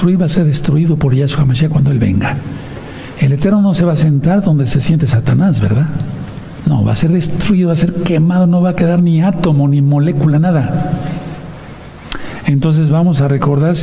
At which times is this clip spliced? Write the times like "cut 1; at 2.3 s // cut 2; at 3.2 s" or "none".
none